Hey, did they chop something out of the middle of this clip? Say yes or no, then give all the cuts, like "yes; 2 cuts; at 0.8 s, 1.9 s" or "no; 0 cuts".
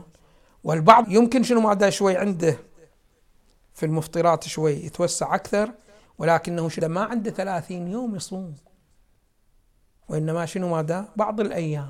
yes; 2 cuts; at 1.0 s, 6.8 s